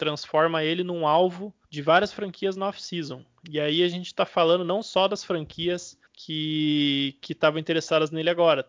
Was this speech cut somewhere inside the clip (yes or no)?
yes